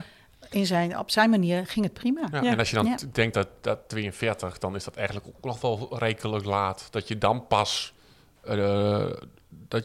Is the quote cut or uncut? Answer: uncut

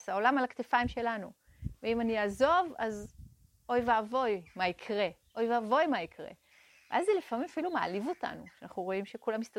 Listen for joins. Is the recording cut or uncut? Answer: uncut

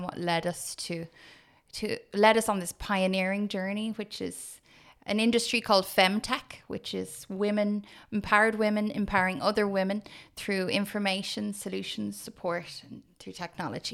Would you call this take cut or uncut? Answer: uncut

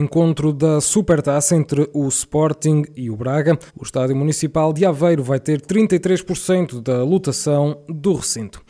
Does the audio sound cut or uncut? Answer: cut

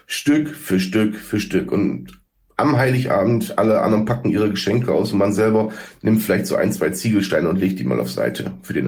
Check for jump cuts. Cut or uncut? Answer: uncut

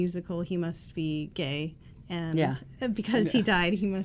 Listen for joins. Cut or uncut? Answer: uncut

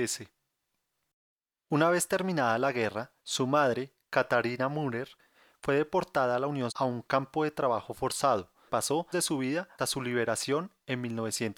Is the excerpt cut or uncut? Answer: cut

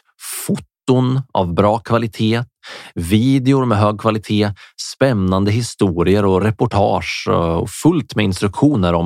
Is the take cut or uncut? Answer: uncut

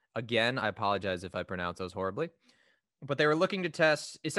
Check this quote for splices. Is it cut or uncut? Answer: uncut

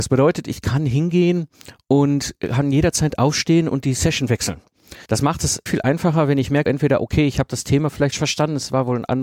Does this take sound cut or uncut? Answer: cut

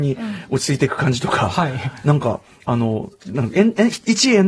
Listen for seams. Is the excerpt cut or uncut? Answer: uncut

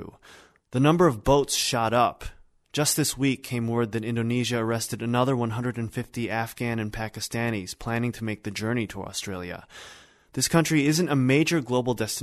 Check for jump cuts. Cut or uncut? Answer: uncut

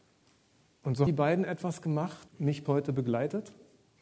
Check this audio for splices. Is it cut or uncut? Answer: cut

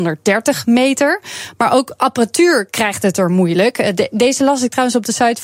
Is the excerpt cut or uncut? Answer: uncut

